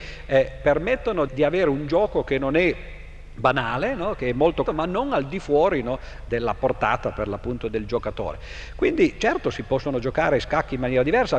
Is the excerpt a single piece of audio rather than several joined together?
no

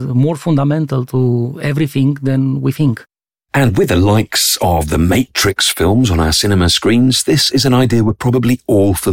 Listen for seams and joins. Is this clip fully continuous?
yes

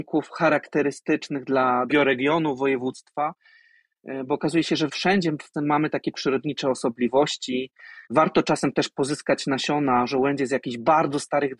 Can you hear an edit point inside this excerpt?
yes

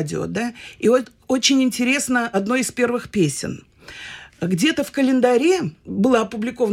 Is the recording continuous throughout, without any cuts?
yes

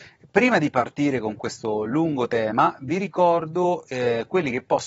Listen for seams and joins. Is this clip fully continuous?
yes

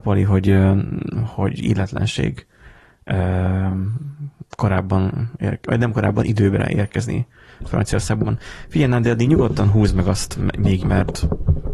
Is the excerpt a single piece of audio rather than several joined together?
no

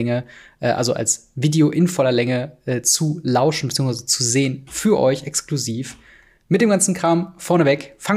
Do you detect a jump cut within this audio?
no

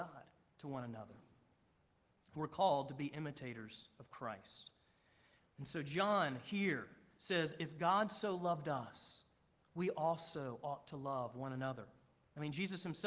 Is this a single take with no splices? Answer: yes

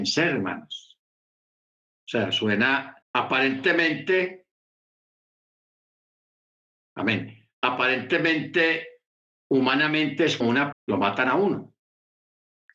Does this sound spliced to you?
yes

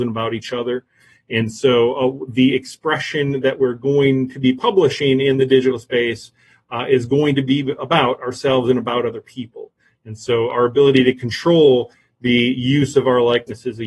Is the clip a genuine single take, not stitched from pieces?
yes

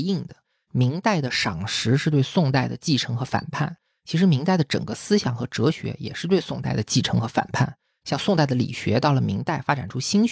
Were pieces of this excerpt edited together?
no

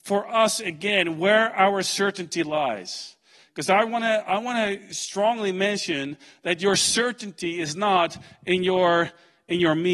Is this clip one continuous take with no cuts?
yes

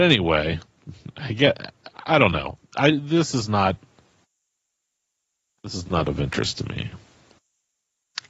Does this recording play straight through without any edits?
yes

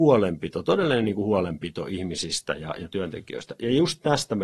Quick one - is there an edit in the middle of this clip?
no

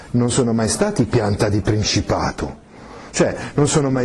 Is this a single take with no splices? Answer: yes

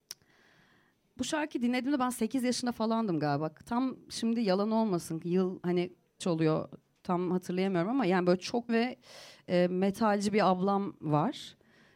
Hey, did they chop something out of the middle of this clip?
yes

